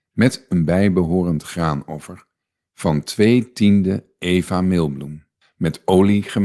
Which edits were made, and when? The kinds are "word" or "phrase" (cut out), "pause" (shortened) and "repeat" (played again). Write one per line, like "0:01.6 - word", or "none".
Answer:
none